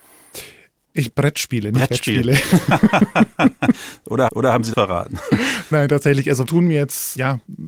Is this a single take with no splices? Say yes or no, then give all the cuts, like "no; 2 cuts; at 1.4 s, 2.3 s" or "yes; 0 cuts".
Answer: no; 5 cuts; at 1.1 s, 4.3 s, 4.7 s, 5.7 s, 6.5 s